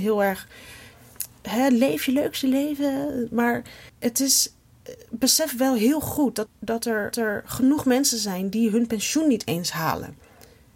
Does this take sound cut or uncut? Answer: cut